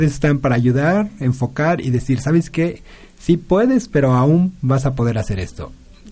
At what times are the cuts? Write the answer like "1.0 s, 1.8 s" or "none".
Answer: none